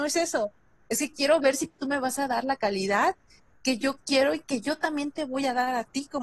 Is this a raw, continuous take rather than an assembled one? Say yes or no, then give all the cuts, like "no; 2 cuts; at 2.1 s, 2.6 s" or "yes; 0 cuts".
yes; 0 cuts